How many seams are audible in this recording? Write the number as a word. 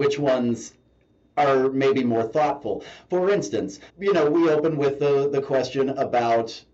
one